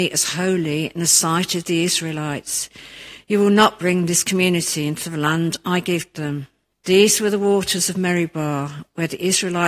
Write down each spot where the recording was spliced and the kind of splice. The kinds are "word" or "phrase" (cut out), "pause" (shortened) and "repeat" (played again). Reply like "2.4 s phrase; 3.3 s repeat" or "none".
6.7 s pause